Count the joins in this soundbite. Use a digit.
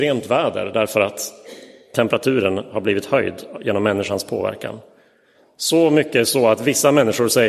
0